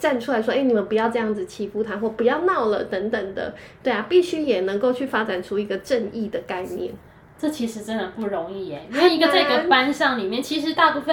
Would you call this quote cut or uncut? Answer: uncut